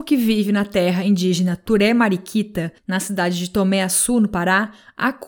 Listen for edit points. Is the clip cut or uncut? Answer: cut